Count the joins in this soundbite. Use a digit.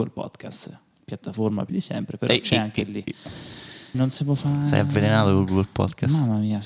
2